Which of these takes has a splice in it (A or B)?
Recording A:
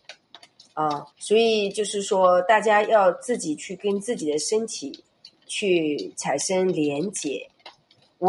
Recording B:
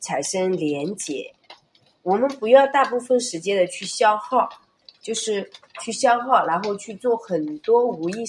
A